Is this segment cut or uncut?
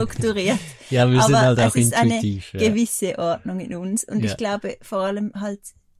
uncut